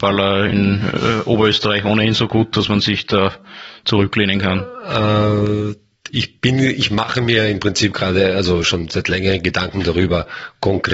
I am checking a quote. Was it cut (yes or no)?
no